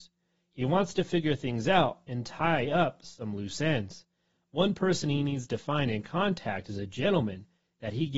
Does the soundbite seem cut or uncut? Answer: uncut